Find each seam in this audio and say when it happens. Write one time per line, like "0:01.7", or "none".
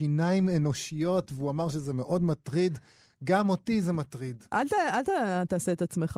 none